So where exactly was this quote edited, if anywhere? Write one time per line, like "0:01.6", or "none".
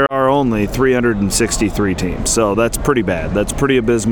none